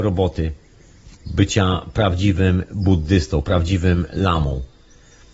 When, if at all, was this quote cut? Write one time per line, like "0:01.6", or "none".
0:01.2